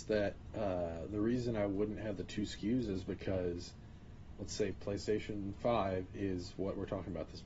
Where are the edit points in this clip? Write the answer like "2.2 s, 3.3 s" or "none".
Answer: 4.4 s